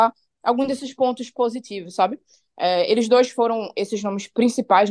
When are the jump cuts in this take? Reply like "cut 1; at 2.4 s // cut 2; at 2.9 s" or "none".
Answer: none